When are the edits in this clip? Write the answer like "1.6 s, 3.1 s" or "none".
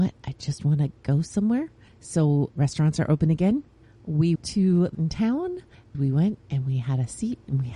2.5 s, 4.4 s, 4.9 s, 5.9 s